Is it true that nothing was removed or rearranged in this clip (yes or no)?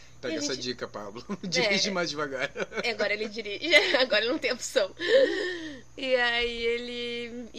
yes